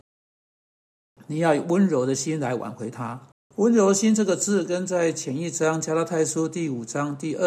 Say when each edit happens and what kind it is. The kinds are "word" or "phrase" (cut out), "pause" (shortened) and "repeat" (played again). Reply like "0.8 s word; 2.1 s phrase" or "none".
3.4 s pause